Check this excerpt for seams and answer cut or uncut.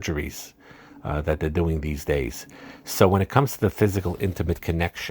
uncut